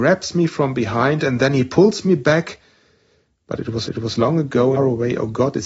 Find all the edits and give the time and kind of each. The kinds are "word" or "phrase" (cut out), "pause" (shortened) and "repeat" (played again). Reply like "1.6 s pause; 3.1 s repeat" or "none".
3.9 s repeat; 4.8 s phrase